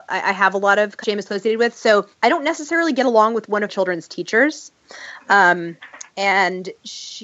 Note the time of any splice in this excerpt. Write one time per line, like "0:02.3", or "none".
0:01.0
0:02.1
0:03.7